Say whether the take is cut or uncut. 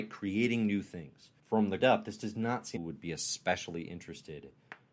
cut